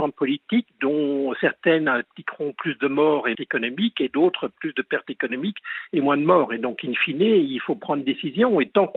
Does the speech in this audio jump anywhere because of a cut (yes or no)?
yes